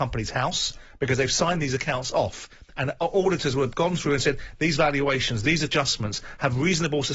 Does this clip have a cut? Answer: no; 0 cuts

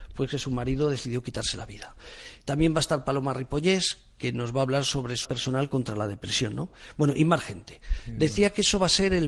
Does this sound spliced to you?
yes; 1 cut; at 5.2 s

